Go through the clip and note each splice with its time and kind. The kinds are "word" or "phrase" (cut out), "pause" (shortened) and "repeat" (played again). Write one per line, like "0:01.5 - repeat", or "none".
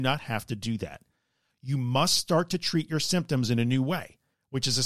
none